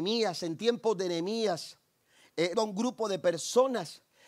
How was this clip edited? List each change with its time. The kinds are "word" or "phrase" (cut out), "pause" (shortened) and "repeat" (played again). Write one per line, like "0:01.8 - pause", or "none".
0:02.5 - word